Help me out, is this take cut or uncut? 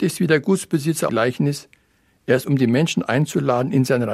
cut